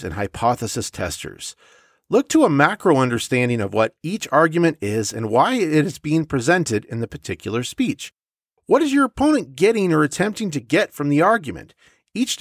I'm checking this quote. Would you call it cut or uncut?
uncut